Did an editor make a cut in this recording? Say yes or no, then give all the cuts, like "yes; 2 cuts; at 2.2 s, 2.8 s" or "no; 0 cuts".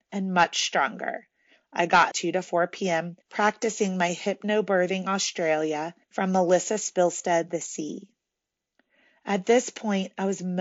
yes; 4 cuts; at 2.1 s, 3.2 s, 6.0 s, 7.5 s